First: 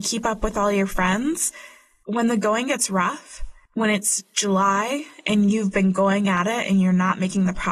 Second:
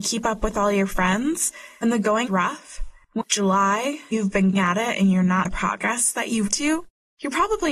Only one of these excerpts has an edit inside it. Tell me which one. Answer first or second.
second